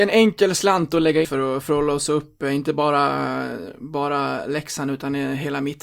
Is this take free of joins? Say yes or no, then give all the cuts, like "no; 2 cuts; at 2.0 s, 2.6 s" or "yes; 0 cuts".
no; 1 cut; at 1.2 s